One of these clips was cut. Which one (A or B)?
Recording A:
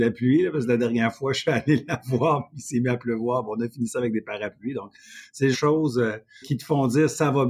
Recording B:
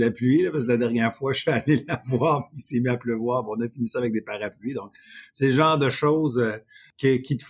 A